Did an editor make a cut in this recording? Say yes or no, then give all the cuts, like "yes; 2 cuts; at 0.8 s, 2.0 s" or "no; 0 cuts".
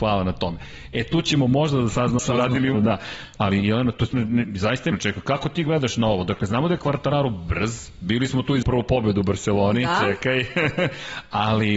yes; 5 cuts; at 2.2 s, 2.7 s, 4.1 s, 4.9 s, 8.6 s